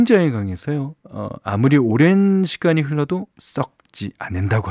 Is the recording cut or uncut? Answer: cut